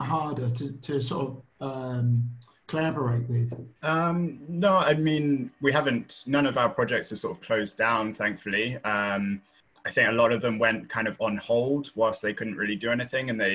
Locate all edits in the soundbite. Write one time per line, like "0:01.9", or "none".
0:01.5
0:03.8